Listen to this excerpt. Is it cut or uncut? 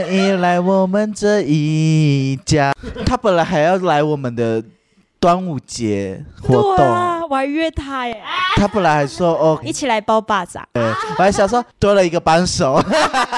cut